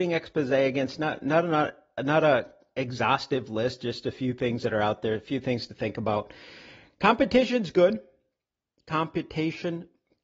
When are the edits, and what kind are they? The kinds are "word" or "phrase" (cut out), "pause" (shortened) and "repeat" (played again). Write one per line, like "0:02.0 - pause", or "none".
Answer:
none